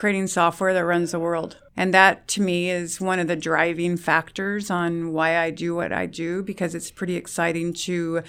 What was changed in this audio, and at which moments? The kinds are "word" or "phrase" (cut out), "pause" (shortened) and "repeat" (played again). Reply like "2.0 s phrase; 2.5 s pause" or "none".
1.7 s pause